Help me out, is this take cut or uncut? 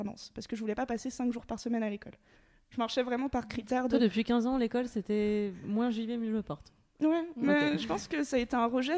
uncut